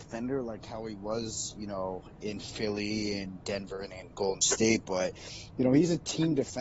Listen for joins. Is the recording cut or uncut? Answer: uncut